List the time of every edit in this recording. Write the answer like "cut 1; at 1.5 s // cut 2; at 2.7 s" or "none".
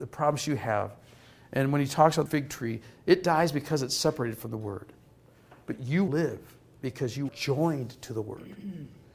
cut 1; at 2.3 s // cut 2; at 6.1 s // cut 3; at 7.3 s